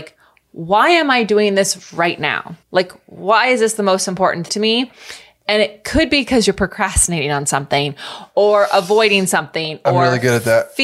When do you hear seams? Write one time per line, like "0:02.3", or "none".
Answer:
0:02.6
0:04.5